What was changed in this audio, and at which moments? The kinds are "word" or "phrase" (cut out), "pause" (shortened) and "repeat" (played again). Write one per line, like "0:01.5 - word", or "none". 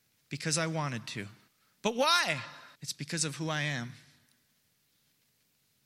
0:01.5 - pause
0:02.7 - pause